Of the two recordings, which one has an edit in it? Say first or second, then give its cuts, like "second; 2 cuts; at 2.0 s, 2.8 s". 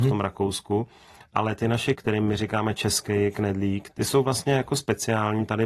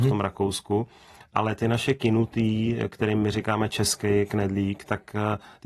first; 2 cuts; at 1.9 s, 3.9 s